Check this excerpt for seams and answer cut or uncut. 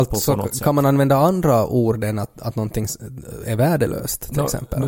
uncut